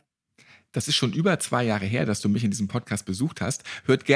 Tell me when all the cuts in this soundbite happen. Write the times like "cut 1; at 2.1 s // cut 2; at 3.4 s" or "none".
none